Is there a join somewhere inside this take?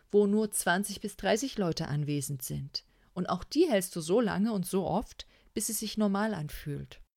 no; 0 cuts

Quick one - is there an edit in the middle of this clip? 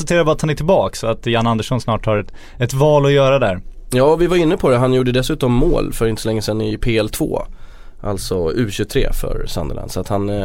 no; 0 cuts

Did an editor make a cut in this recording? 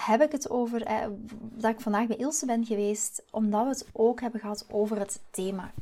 no; 0 cuts

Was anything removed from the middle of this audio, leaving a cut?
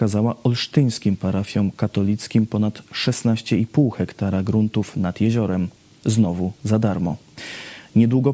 no; 0 cuts

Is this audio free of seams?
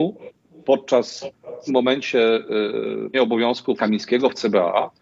no; 3 cuts; at 1.7 s, 3.1 s, 3.8 s

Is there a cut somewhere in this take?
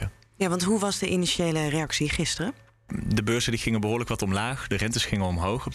no; 0 cuts

